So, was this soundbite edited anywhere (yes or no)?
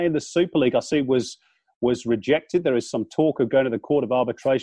no